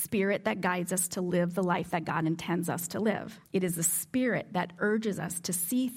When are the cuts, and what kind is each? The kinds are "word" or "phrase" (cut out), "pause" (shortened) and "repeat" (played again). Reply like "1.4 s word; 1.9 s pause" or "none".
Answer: 3.5 s pause